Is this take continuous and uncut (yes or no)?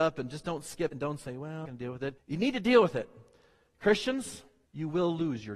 no